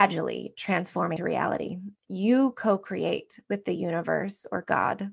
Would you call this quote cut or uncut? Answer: cut